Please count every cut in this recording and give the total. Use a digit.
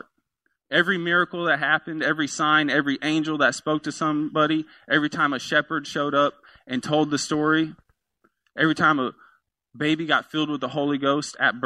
0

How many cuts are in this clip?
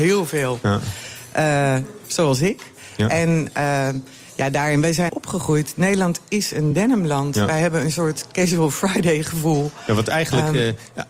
1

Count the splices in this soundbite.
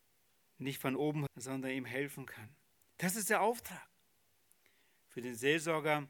1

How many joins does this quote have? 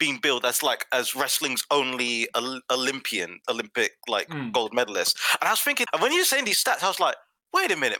1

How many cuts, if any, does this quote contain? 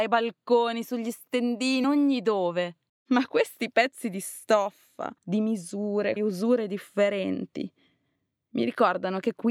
4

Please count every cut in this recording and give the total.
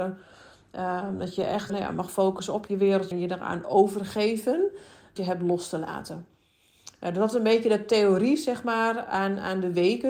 4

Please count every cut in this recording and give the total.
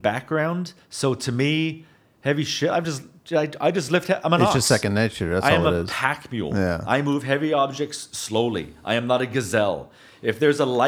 0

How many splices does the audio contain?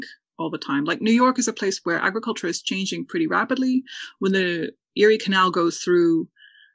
0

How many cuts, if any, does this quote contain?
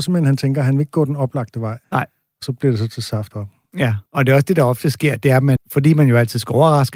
4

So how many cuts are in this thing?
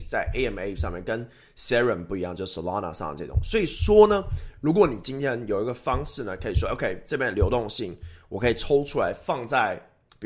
0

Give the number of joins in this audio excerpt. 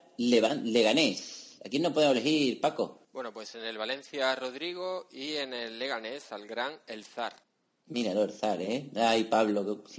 2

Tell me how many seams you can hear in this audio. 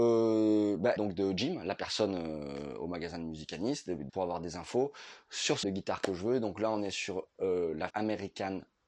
4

